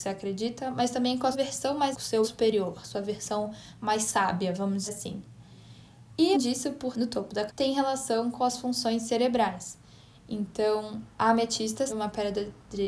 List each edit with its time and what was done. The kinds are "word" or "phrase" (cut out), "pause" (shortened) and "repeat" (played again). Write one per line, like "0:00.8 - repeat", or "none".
0:01.3 - word
0:01.9 - word
0:02.2 - word
0:04.9 - word
0:06.3 - word
0:06.9 - word
0:07.5 - word
0:11.9 - word